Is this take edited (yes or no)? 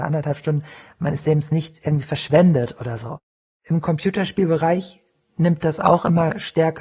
no